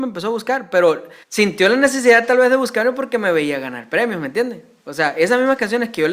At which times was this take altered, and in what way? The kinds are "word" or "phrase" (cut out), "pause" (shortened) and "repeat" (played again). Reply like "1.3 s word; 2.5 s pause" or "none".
1.2 s pause

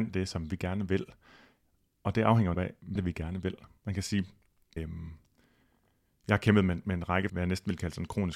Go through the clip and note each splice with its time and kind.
2.5 s word; 3.0 s word; 4.8 s word; 7.3 s word

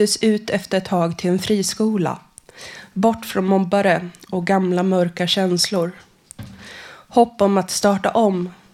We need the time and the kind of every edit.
none

